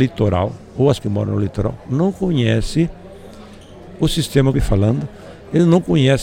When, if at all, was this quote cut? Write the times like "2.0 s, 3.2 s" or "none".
1.0 s, 4.5 s